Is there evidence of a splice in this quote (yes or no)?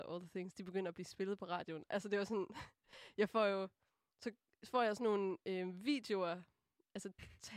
no